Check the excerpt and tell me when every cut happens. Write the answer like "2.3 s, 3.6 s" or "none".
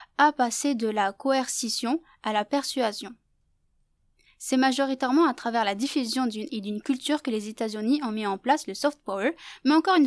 6.5 s

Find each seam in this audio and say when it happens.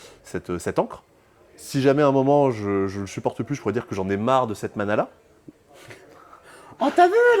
none

